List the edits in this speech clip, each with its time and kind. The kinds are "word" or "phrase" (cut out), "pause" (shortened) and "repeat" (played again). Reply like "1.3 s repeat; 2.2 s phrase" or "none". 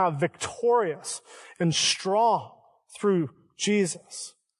none

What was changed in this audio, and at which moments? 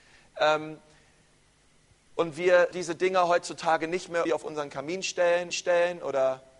2.7 s word; 4.3 s word; 5.5 s repeat

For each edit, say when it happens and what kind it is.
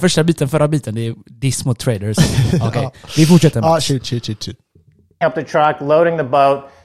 none

